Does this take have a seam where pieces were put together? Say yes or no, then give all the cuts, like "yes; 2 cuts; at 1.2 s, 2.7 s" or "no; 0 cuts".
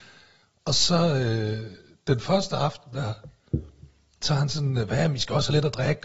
no; 0 cuts